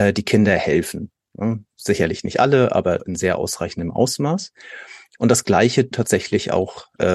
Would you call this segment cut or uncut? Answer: cut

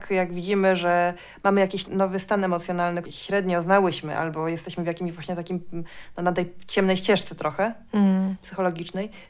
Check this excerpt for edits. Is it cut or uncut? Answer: cut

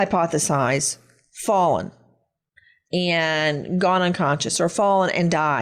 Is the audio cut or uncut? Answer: uncut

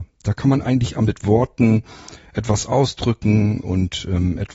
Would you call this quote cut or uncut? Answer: cut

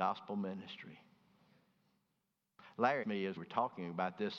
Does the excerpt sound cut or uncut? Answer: cut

